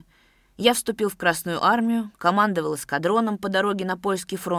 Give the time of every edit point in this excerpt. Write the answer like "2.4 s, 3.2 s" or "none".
none

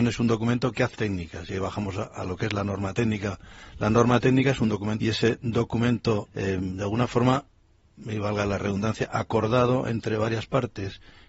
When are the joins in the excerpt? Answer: 0.9 s, 5.0 s, 6.3 s

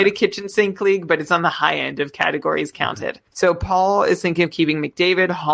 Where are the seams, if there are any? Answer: 3.3 s

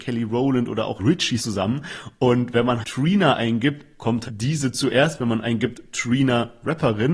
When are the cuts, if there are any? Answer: 1.0 s, 1.4 s, 2.8 s, 4.2 s

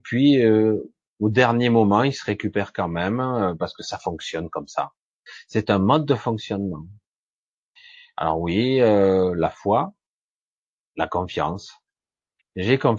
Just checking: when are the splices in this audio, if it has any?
none

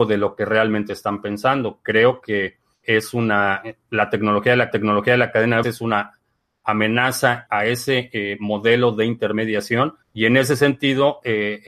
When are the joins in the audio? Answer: 2.8 s, 4.7 s, 5.6 s, 7.5 s, 10.0 s

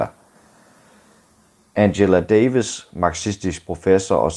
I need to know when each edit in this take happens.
none

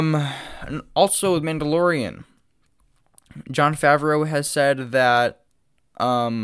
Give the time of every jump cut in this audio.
none

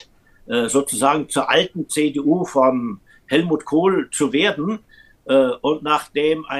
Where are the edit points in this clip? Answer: none

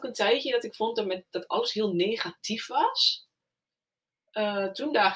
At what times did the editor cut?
none

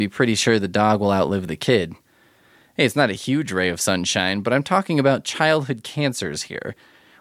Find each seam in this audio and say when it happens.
none

